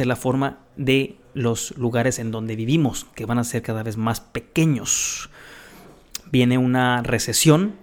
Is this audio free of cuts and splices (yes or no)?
yes